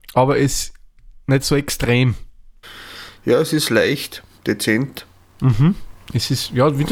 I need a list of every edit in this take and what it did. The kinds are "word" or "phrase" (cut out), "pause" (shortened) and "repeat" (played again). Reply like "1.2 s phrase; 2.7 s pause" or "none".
none